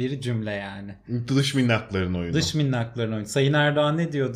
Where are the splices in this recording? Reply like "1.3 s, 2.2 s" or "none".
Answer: none